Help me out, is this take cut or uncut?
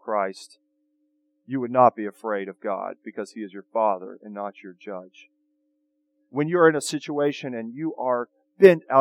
uncut